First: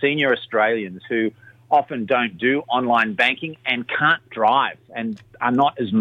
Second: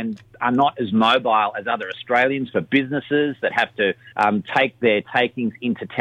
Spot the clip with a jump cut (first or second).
second